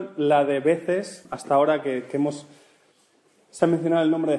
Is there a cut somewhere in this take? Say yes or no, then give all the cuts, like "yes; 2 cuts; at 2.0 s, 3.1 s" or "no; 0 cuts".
no; 0 cuts